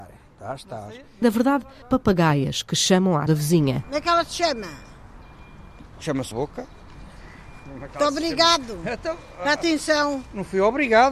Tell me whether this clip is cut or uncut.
cut